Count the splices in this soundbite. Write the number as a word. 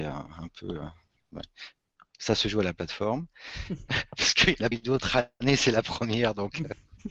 two